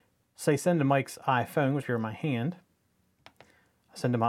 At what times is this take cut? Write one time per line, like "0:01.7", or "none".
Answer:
0:01.8

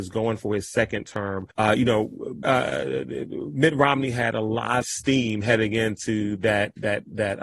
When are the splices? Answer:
0:01.5
0:02.4
0:04.8

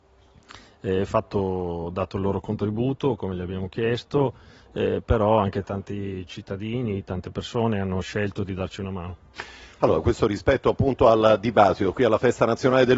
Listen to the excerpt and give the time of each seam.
none

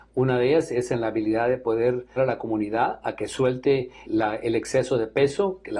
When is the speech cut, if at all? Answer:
0:02.2
0:04.0

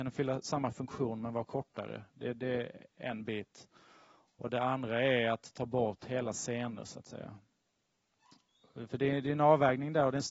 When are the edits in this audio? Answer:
none

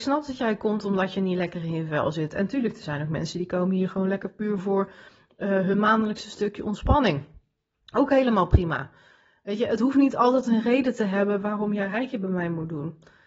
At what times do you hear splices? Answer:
none

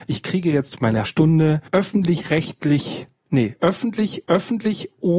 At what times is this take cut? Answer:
0:01.0
0:01.7
0:04.3

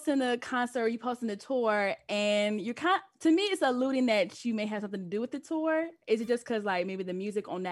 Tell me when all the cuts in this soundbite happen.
none

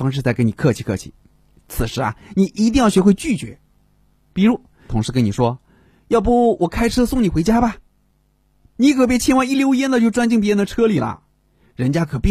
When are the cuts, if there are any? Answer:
0:04.9

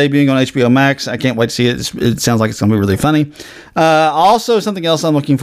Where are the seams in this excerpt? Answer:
none

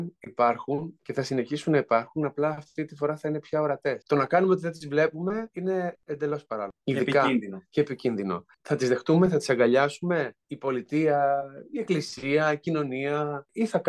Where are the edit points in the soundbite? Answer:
0:04.0
0:08.5
0:10.4

